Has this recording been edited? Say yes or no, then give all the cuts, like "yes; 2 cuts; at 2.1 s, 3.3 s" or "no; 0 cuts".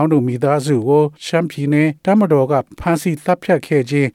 yes; 2 cuts; at 1.2 s, 2.0 s